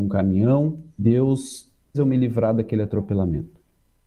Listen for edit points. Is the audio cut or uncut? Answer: cut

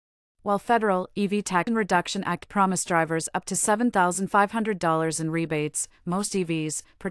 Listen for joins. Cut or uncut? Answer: cut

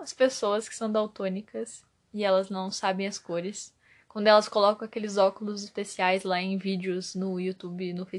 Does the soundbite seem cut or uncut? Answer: uncut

